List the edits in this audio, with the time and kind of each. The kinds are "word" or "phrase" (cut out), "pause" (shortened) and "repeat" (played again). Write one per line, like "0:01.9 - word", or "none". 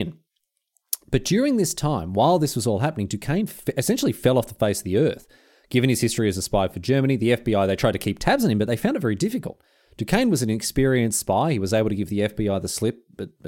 none

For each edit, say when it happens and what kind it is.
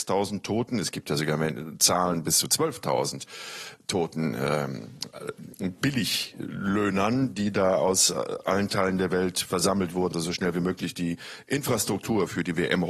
0:10.1 - word

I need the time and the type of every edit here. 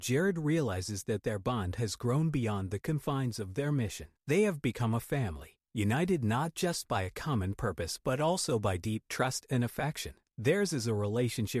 none

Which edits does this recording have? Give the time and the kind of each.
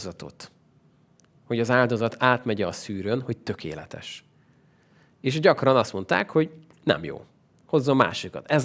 none

